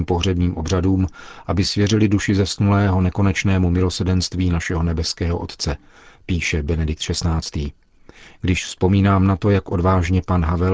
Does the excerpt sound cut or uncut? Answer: uncut